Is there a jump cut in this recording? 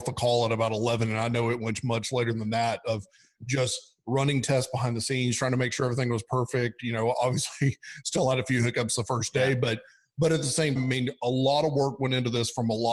yes; 1 cut; at 10.8 s

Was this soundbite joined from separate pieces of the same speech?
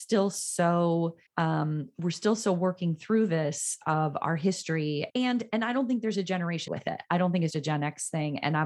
yes; 4 cuts; at 1.3 s, 5.1 s, 6.7 s, 7.5 s

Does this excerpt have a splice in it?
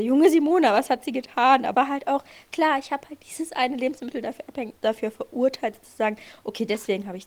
yes; 2 cuts; at 1.7 s, 4.8 s

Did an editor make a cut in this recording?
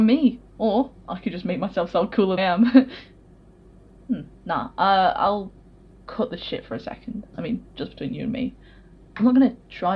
yes; 2 cuts; at 2.4 s, 4.4 s

